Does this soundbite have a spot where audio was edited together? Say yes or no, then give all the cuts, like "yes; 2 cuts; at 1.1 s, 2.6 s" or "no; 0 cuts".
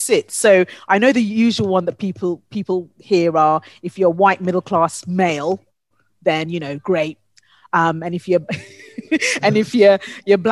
no; 0 cuts